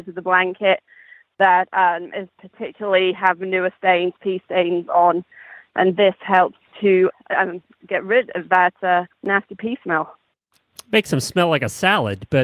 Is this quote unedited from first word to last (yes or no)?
no